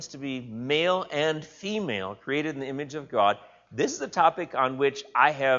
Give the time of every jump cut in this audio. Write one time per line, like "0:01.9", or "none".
none